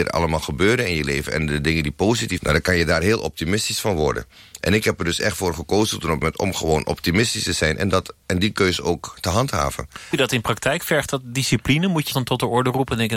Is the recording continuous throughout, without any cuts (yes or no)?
no